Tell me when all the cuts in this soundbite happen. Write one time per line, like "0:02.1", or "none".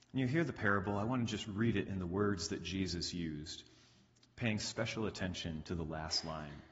none